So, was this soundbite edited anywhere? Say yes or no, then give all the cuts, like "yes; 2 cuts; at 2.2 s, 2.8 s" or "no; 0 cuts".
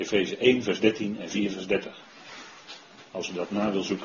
no; 0 cuts